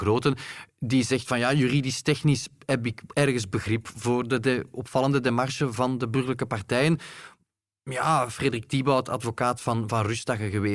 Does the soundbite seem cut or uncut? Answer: uncut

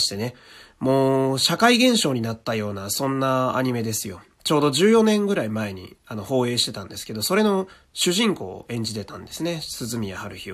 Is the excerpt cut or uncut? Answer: uncut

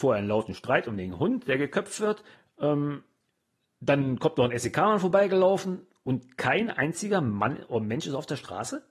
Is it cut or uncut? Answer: cut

